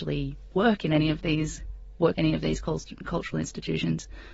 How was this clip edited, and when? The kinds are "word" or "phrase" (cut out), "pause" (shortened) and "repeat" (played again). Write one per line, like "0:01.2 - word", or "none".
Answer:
0:02.1 - word

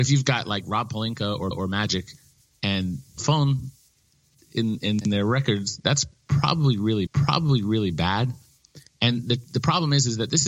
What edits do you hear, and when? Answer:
0:01.5 - repeat
0:03.2 - phrase
0:07.1 - repeat

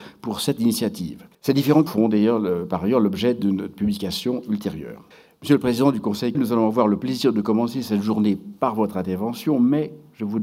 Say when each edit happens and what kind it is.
0:01.3 - pause
0:01.9 - word
0:05.1 - pause
0:06.3 - word

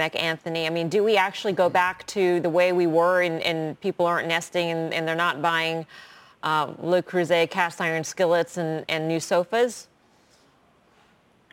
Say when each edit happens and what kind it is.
none

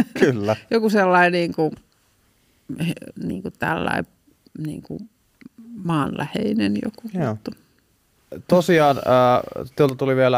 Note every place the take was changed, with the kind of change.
none

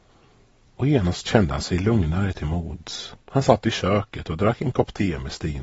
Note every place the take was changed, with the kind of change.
0:03.2 - pause

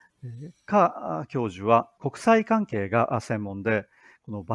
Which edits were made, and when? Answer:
0:02.0 - word

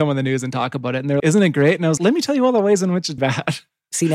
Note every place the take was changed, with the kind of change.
0:01.2 - word
0:02.0 - word
0:03.2 - phrase

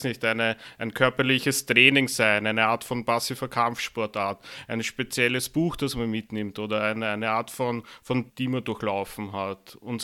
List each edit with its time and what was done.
0:08.3 - word

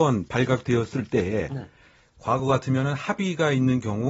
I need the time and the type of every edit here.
none

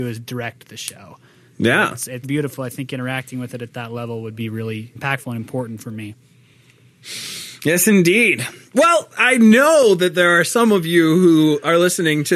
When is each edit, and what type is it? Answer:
0:02.2 - word
0:05.0 - word

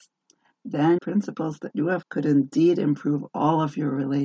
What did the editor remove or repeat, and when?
0:01.0 - phrase
0:02.0 - word

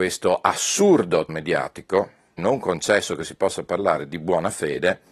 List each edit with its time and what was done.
0:01.3 - word
0:02.4 - phrase

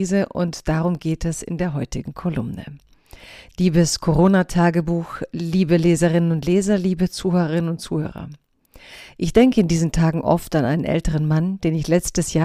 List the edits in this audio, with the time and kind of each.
none

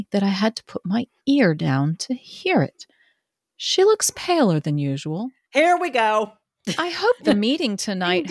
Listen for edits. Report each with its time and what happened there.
none

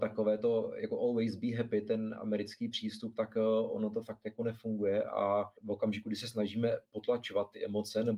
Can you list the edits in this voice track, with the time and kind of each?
0:05.6 - pause

